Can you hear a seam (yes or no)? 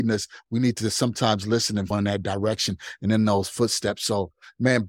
yes